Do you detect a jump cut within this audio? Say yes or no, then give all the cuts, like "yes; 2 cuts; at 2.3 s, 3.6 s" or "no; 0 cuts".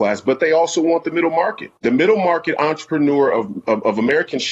yes; 1 cut; at 1.8 s